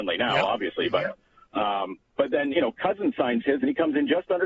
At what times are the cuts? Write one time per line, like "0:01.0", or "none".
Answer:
none